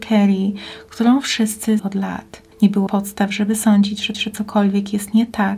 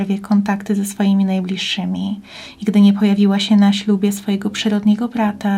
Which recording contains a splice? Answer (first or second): first